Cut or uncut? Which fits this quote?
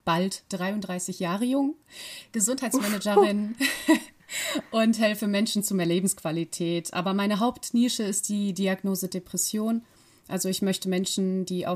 uncut